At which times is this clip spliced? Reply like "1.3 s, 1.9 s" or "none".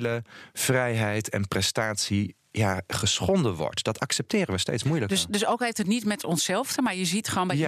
6.8 s